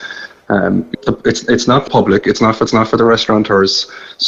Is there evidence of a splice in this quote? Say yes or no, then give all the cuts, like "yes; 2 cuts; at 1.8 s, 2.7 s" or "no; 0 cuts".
yes; 3 cuts; at 0.9 s, 1.9 s, 2.7 s